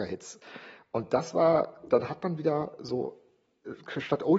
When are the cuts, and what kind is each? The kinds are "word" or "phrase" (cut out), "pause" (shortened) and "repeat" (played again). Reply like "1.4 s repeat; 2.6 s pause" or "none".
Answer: 2.8 s word